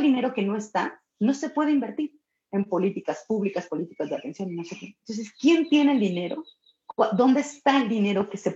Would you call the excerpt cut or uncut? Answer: uncut